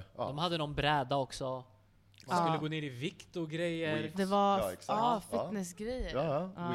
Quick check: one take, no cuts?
no; 1 cut; at 4.1 s

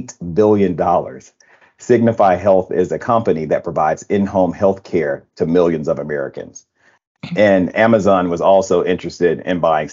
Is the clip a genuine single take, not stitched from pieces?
yes; 0 cuts

